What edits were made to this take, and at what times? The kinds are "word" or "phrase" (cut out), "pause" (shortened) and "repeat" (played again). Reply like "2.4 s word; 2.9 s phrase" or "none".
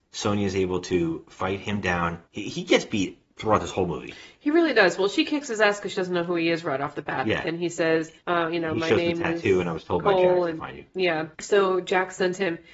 2.3 s pause; 3.3 s pause; 8.2 s pause; 11.3 s pause